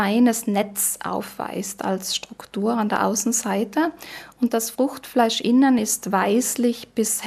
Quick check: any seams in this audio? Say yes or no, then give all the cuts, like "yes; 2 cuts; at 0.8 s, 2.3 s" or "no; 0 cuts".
no; 0 cuts